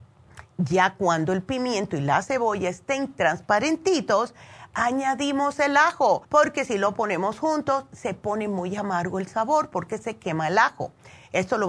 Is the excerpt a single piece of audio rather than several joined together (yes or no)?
no